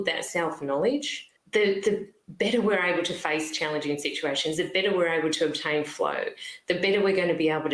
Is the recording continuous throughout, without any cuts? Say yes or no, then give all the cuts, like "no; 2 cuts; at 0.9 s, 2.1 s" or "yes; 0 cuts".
no; 1 cut; at 1.4 s